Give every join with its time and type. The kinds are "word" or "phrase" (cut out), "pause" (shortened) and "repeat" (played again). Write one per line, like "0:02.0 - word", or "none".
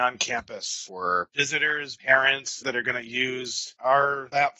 0:02.0 - word
0:02.6 - word